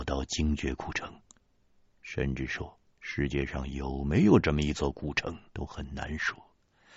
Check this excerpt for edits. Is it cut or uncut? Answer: cut